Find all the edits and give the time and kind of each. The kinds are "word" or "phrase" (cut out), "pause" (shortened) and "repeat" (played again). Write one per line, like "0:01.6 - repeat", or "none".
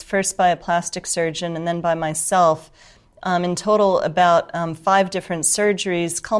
none